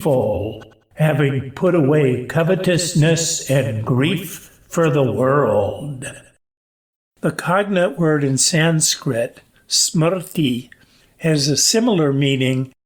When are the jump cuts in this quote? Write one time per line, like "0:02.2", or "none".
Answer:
none